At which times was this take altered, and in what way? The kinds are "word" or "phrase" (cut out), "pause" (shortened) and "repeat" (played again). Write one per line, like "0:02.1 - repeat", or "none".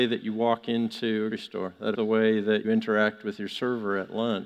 0:01.3 - word
0:01.9 - word
0:02.6 - word